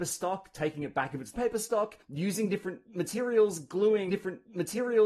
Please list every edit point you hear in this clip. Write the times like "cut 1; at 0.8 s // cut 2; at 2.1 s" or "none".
cut 1; at 1.3 s // cut 2; at 2.0 s // cut 3; at 4.1 s